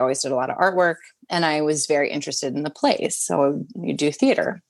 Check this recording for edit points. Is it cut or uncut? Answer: uncut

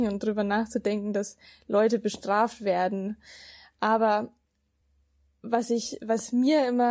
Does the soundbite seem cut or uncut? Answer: uncut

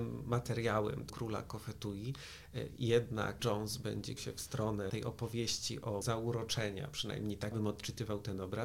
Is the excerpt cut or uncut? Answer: cut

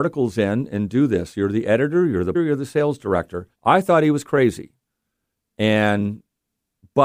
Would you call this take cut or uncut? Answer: cut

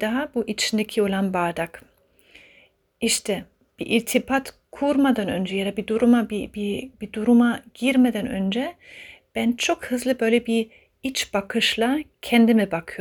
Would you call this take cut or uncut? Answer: cut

